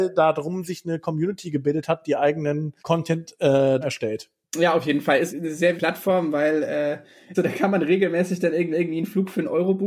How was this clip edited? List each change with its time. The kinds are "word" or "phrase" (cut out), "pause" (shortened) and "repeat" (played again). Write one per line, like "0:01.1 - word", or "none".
0:02.8 - pause
0:03.8 - word
0:05.3 - word
0:05.8 - word
0:07.3 - phrase
0:08.7 - repeat